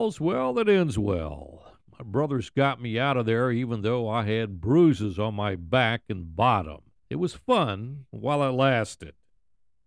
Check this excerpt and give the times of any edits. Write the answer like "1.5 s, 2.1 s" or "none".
1.8 s, 7.0 s, 8.1 s